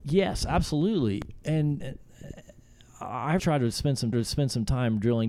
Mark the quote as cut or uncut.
cut